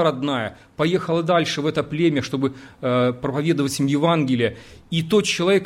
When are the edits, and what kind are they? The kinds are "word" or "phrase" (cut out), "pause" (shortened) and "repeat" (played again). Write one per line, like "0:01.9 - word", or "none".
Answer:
none

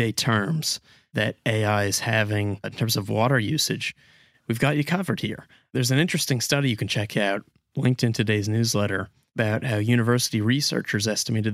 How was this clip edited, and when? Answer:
none

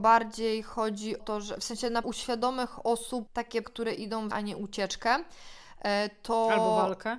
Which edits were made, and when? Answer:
0:01.2 - word
0:02.0 - word
0:03.3 - word
0:03.6 - word
0:04.3 - word

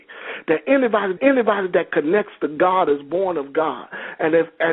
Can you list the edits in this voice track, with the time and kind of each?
0:01.2 - repeat

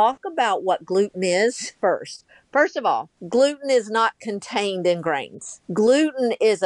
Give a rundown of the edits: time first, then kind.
0:01.8 - pause
0:03.2 - pause
0:05.6 - pause

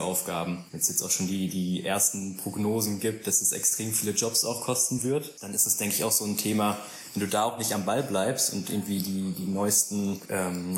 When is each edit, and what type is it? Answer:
none

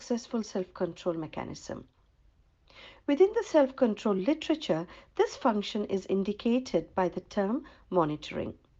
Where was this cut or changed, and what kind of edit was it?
none

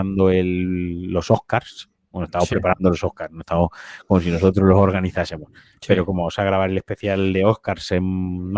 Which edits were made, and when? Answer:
none

